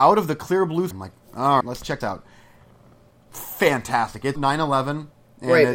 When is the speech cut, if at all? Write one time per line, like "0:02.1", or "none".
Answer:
0:00.9
0:01.6
0:02.0
0:04.4